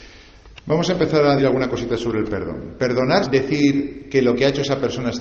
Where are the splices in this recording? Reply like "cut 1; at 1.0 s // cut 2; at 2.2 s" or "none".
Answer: cut 1; at 1.4 s // cut 2; at 3.2 s